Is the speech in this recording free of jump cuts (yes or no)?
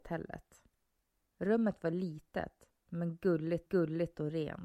no